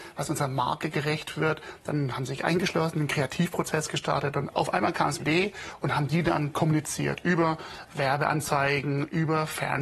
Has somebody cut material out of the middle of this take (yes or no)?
yes